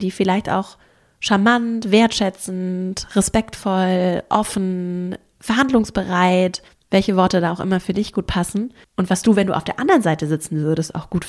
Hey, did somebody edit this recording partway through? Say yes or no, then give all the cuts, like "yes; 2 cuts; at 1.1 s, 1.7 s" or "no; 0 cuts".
yes; 2 cuts; at 6.7 s, 8.8 s